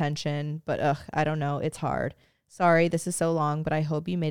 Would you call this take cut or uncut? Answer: uncut